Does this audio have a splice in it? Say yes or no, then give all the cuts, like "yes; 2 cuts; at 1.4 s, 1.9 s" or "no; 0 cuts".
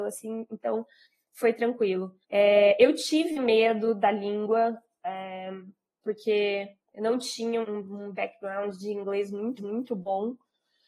yes; 4 cuts; at 2.2 s, 6.8 s, 7.6 s, 9.6 s